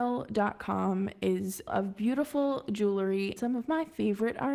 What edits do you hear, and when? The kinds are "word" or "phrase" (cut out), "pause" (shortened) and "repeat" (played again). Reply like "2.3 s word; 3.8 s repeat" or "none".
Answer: 1.7 s word; 3.4 s word